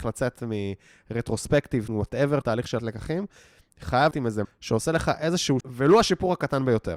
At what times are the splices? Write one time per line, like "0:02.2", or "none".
0:01.9
0:02.4
0:02.8
0:04.1
0:04.4
0:05.6